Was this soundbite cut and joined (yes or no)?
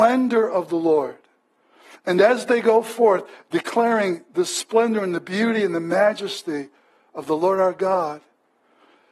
no